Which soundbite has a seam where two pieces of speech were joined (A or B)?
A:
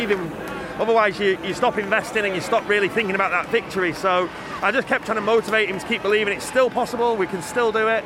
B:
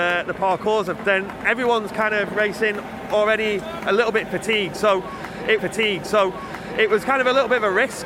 B